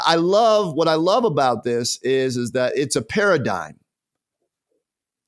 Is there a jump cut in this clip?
no; 0 cuts

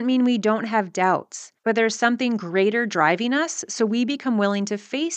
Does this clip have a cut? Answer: yes; 1 cut; at 1.6 s

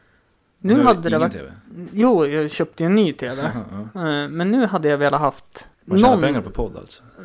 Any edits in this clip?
yes; 1 cut; at 5.7 s

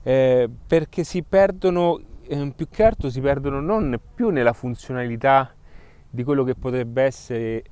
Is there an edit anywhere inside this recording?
no; 0 cuts

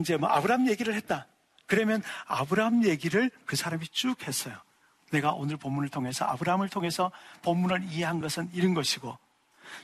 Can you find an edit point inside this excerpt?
no; 0 cuts

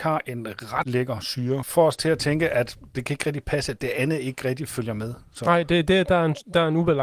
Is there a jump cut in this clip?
no; 0 cuts

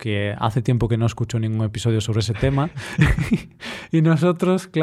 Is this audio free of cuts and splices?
yes; 0 cuts

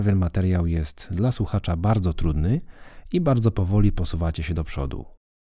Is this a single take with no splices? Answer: yes; 0 cuts

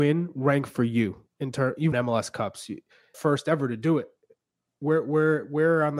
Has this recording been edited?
yes; 2 cuts; at 1.9 s, 3.1 s

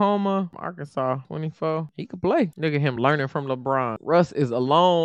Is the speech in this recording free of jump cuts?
yes; 0 cuts

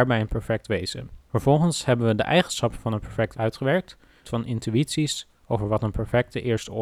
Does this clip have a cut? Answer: yes; 3 cuts; at 1.2 s, 3.3 s, 4.2 s

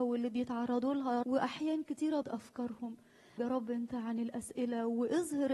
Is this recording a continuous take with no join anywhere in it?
no; 3 cuts; at 1.2 s, 2.2 s, 3.4 s

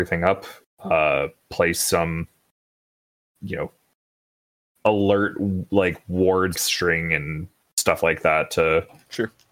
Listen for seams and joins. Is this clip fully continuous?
no; 1 cut; at 6.6 s

